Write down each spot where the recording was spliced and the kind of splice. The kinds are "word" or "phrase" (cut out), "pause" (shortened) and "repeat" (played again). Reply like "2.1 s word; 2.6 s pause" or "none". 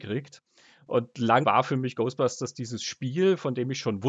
1.4 s word